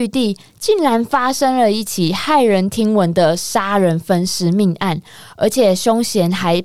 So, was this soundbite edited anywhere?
no; 0 cuts

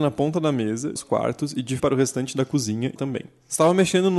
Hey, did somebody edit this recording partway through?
yes; 3 cuts; at 1.0 s, 1.8 s, 3.0 s

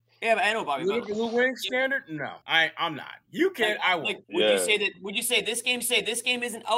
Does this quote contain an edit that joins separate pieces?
yes; 4 cuts; at 1.0 s, 2.4 s, 4.2 s, 5.8 s

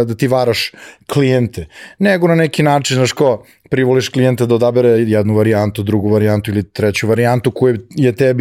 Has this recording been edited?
no; 0 cuts

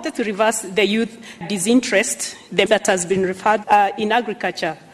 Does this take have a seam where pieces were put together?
yes; 3 cuts; at 1.4 s, 2.7 s, 3.6 s

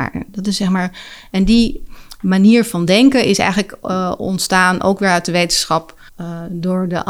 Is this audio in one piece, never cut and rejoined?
no; 1 cut; at 6.1 s

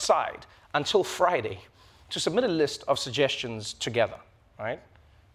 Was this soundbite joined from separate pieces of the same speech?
no; 0 cuts

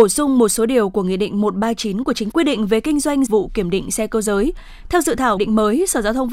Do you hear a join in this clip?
yes; 3 cuts; at 2.3 s, 3.3 s, 5.4 s

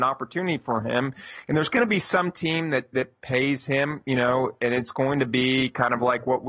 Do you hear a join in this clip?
no; 0 cuts

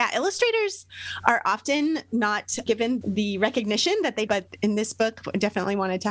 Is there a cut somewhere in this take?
yes; 3 cuts; at 2.7 s, 3.0 s, 4.3 s

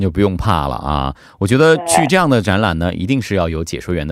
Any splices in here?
no; 0 cuts

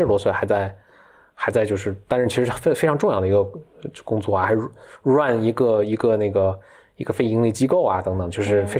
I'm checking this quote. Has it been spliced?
no; 0 cuts

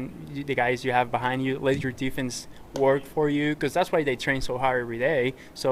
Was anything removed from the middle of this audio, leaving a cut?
no; 0 cuts

